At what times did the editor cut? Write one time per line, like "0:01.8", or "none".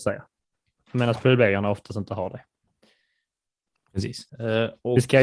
0:04.3

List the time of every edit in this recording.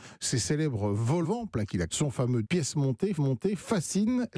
0:01.2
0:01.9
0:02.4
0:03.2

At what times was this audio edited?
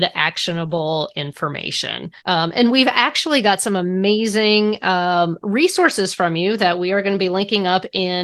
0:02.2

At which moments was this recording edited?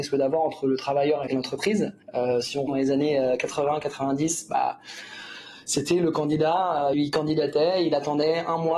0:01.3
0:02.0
0:02.7
0:06.9

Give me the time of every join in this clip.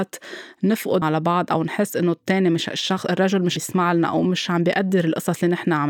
0:01.0
0:03.6

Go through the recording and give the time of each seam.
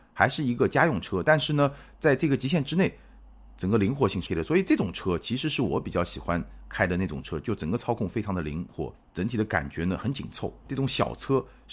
0:04.3

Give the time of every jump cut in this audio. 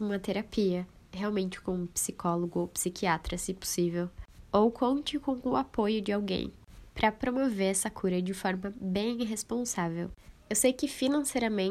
none

